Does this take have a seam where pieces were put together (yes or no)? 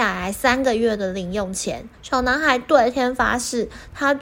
yes